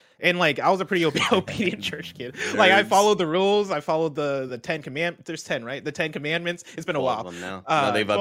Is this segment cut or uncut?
cut